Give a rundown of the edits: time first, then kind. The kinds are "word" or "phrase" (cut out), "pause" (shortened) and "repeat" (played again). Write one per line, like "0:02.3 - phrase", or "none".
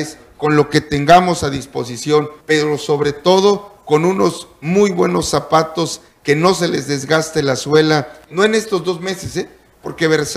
0:02.4 - pause